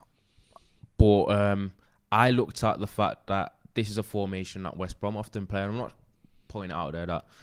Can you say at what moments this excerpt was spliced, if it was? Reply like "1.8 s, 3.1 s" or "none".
none